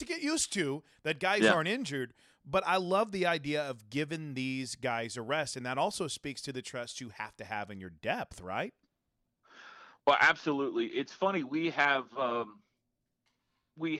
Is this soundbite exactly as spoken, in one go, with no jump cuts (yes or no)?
yes